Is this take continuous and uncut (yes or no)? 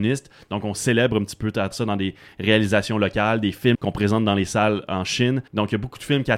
no